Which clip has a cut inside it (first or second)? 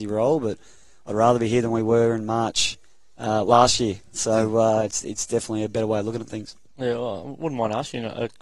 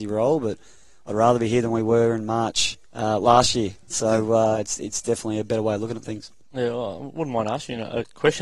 second